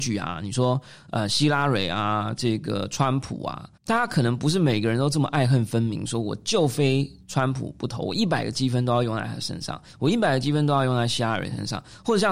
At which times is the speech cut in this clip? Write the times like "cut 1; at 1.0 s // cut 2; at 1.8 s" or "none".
cut 1; at 3.8 s